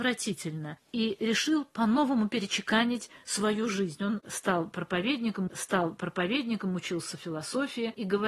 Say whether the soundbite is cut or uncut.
cut